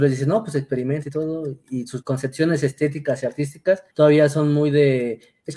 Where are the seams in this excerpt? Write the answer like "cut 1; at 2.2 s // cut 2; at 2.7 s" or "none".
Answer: cut 1; at 2.0 s // cut 2; at 3.9 s